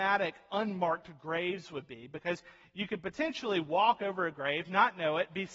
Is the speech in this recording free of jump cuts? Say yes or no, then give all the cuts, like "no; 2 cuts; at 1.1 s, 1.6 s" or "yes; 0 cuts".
yes; 0 cuts